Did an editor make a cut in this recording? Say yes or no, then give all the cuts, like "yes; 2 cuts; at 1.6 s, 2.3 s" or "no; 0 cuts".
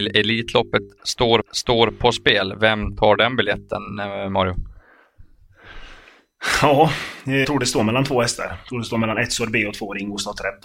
yes; 2 cuts; at 1.4 s, 7.4 s